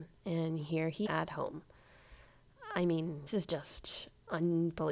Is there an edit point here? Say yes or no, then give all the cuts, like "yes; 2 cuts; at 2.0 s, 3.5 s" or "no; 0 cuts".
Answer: yes; 2 cuts; at 1.1 s, 3.3 s